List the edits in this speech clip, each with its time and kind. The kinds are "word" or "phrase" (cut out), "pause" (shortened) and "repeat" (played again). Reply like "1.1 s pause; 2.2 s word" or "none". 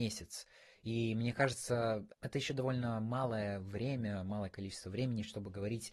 2.1 s pause

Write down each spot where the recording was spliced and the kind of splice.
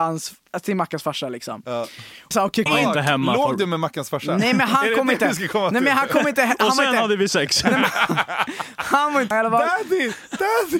2.3 s word; 2.7 s word; 9.3 s word

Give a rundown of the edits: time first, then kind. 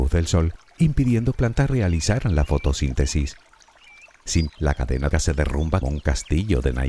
1.3 s phrase; 4.5 s word; 5.1 s word; 5.8 s word

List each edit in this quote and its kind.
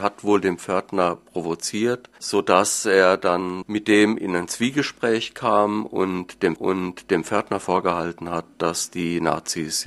2.2 s pause; 6.6 s repeat

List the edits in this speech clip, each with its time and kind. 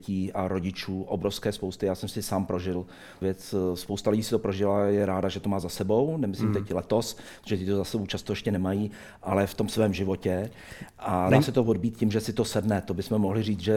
3.2 s word; 11.3 s word

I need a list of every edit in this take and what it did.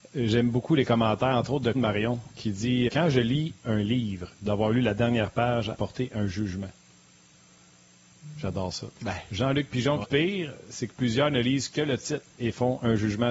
1.7 s word; 2.9 s word; 4.3 s phrase; 5.7 s phrase; 9.0 s pause; 10.0 s phrase

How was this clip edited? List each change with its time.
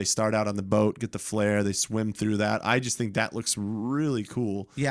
none

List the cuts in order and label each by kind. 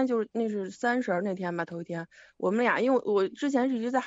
none

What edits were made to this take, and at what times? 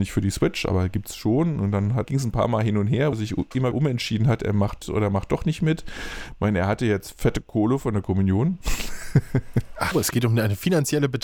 2.0 s word; 3.1 s word; 3.7 s word; 4.8 s word; 9.9 s word

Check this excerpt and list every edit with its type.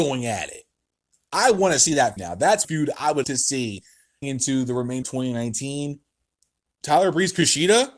2.2 s word; 2.6 s word; 3.2 s word; 4.2 s word; 5.0 s word

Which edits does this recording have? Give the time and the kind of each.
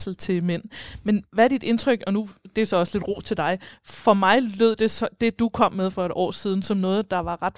none

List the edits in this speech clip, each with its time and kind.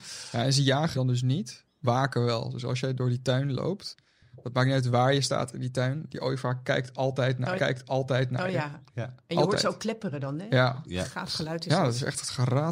0.9 s word; 1.8 s word; 7.6 s repeat

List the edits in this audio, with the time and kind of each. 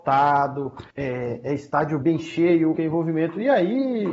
0.9 s pause; 2.0 s word; 2.8 s word

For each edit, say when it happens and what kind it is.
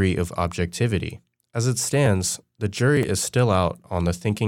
1.3 s pause

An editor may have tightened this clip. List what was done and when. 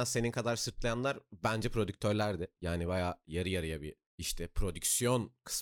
4.1 s pause

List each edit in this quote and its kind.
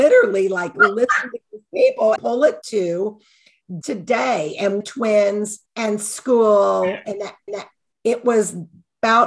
2.2 s word; 2.6 s word; 3.8 s word; 4.8 s phrase; 5.7 s pause; 7.5 s repeat

